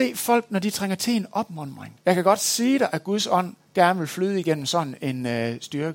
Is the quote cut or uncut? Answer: cut